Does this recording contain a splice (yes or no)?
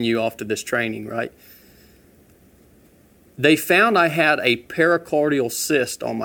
no